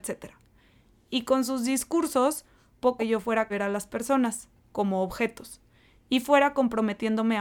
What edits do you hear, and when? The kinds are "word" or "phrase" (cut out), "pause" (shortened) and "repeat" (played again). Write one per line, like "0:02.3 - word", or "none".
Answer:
0:03.0 - phrase
0:03.5 - phrase